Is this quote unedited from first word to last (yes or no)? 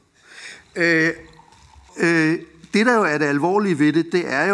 no